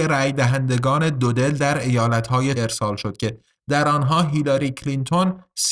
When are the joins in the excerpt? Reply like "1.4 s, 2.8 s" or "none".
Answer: 2.6 s